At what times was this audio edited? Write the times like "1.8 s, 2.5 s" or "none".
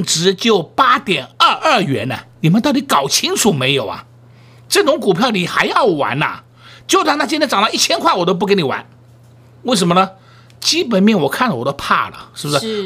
none